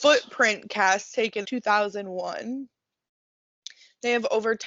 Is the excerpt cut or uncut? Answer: cut